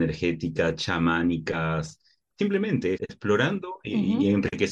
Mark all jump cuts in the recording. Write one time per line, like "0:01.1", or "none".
0:02.9